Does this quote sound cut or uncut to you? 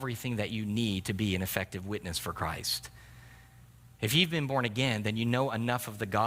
uncut